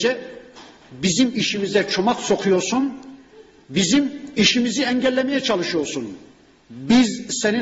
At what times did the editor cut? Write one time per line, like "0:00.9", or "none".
none

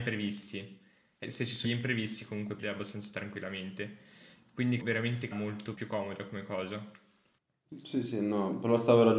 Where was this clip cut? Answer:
0:01.2
0:01.6
0:02.6
0:04.8
0:05.3
0:05.7

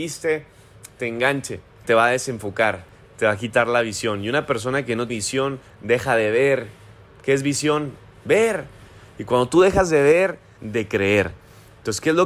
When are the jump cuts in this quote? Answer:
0:01.8
0:05.1
0:10.6

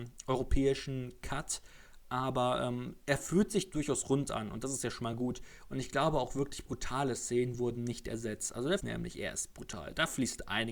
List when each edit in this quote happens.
0:08.8

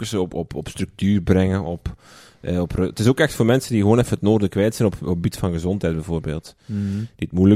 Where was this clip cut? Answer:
none

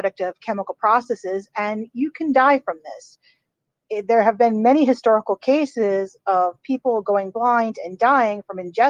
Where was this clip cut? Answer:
none

